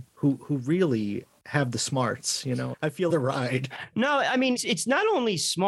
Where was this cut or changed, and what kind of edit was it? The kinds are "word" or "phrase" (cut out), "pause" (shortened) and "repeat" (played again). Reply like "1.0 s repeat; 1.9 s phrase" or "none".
2.7 s word; 3.1 s phrase; 4.6 s word